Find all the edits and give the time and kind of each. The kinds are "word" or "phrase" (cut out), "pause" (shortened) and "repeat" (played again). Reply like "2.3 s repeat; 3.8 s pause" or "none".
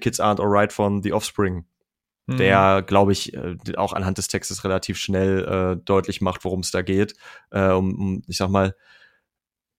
none